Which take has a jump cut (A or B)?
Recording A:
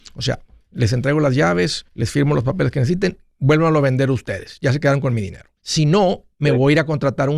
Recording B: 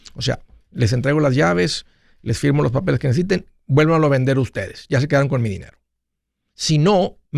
A